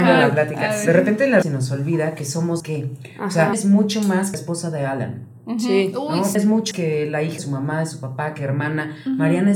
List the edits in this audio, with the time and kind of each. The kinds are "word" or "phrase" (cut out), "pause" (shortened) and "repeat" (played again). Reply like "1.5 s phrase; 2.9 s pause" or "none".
1.4 s word; 2.6 s word; 3.5 s word; 4.3 s word; 6.3 s word; 6.7 s word; 7.4 s word